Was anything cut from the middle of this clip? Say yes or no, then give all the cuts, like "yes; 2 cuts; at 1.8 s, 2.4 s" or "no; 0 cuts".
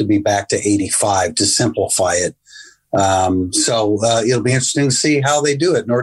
no; 0 cuts